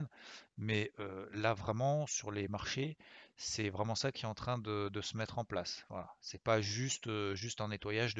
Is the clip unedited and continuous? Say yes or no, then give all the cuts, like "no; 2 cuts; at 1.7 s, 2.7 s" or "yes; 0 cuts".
yes; 0 cuts